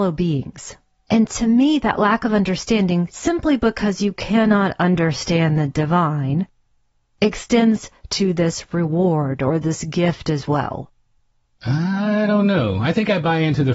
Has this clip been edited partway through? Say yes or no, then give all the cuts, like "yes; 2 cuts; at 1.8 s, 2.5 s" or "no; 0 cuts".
no; 0 cuts